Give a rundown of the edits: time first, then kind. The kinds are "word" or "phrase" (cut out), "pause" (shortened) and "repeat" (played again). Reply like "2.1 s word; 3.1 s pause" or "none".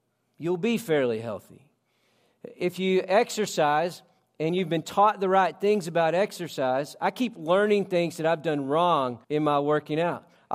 9.2 s pause